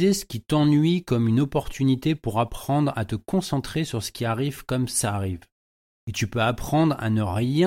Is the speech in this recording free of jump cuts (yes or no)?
yes